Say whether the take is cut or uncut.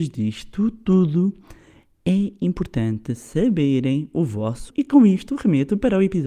cut